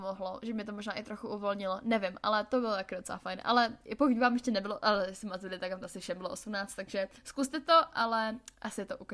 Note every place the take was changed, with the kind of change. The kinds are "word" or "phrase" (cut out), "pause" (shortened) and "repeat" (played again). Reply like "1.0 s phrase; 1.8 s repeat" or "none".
7.2 s pause